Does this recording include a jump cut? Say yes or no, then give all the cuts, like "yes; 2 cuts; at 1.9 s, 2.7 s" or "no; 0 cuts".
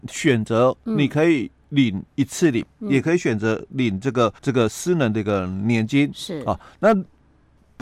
yes; 2 cuts; at 2.1 s, 4.4 s